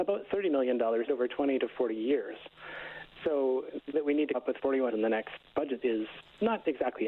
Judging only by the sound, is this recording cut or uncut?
cut